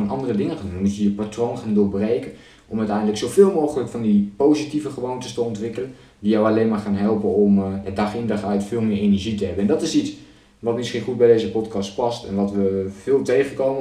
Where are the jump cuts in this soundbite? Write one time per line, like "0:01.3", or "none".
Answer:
none